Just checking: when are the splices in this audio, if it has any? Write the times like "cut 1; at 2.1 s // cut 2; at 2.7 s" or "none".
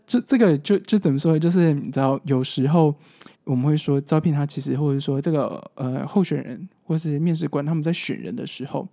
cut 1; at 3.3 s